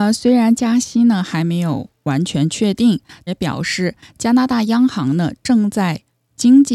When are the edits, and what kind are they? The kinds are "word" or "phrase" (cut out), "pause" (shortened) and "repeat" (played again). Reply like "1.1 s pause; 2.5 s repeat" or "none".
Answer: 3.3 s phrase